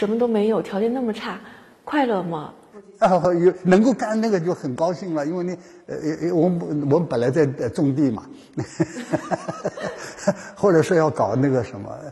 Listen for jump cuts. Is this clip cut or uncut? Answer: uncut